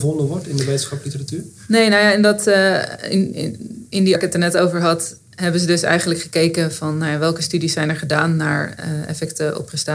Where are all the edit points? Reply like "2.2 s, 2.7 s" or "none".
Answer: 4.2 s